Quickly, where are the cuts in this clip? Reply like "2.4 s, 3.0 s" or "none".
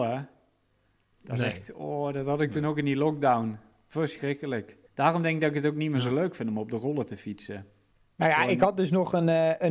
4.9 s, 7.9 s